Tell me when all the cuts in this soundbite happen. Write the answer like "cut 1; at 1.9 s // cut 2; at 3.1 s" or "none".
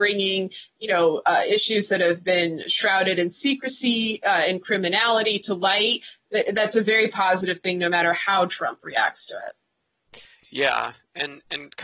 none

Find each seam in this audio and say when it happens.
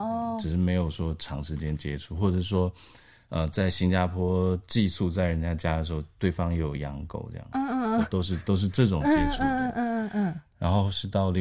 none

